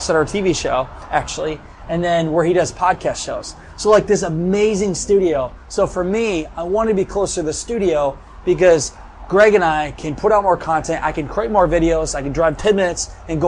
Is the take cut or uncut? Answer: uncut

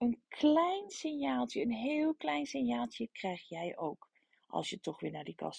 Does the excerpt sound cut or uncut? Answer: uncut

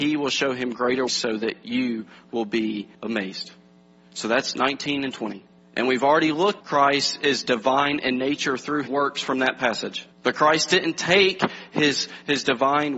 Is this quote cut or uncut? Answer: cut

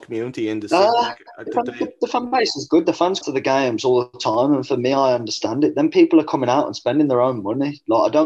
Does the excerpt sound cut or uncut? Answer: cut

